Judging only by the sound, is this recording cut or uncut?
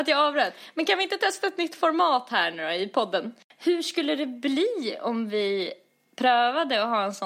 uncut